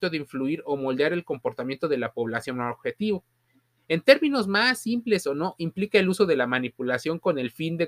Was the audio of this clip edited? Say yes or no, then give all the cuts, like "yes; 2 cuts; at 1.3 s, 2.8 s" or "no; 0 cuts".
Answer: no; 0 cuts